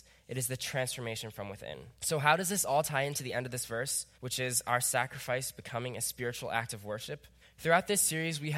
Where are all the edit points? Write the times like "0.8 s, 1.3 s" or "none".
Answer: 2.0 s, 4.1 s, 7.4 s